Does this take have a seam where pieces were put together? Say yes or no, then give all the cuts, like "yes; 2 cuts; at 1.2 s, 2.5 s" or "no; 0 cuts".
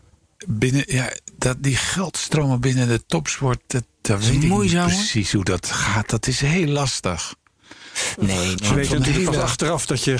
no; 0 cuts